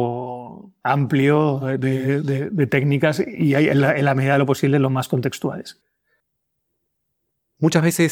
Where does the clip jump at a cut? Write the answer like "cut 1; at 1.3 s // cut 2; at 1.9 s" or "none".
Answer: none